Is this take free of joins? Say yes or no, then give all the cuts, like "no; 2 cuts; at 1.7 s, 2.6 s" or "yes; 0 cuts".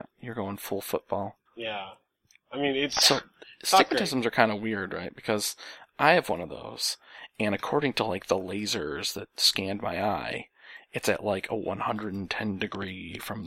no; 1 cut; at 1.5 s